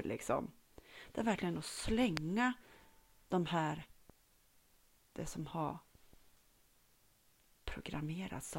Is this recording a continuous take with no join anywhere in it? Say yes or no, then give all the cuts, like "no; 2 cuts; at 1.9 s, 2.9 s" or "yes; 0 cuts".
yes; 0 cuts